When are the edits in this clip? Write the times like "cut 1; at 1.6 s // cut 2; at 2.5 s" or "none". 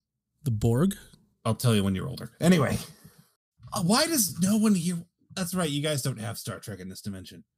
none